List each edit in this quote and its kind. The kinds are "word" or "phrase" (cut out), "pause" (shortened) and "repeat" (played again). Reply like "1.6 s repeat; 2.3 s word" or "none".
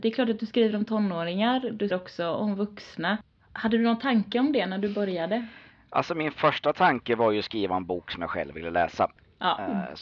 1.9 s word